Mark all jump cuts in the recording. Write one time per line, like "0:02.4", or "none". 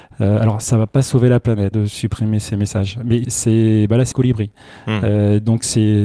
0:01.7
0:03.2
0:04.1